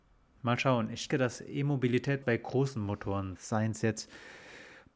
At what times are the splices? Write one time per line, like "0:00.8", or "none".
0:01.1
0:02.2
0:03.4